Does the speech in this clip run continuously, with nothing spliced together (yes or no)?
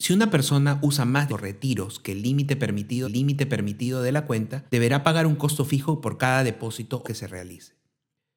no